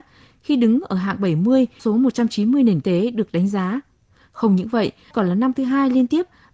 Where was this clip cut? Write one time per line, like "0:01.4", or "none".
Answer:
0:01.8
0:02.8
0:05.1